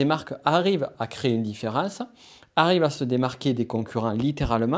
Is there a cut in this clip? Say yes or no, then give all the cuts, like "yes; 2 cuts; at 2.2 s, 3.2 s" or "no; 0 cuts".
no; 0 cuts